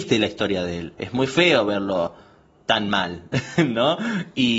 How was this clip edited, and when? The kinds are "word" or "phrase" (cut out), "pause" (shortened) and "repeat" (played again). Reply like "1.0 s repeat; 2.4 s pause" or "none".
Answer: none